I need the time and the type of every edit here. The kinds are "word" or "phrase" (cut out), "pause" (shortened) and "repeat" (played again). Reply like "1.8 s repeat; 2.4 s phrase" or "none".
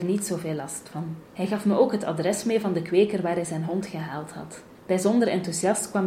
1.2 s pause; 4.7 s pause